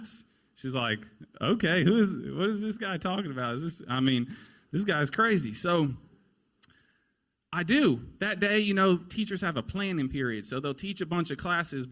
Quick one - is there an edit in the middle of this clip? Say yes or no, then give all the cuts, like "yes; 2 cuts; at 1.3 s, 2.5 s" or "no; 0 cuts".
no; 0 cuts